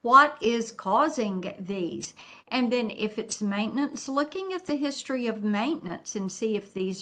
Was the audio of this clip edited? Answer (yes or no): no